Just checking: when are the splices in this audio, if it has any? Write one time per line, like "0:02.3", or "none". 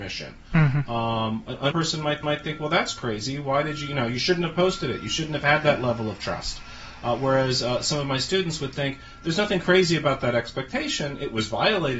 0:01.7
0:02.2